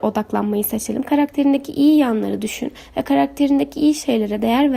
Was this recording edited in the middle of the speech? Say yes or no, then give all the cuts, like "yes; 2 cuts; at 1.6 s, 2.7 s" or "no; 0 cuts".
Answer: no; 0 cuts